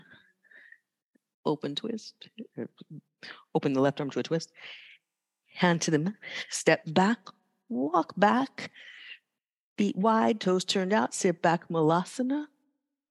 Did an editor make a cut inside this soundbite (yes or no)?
no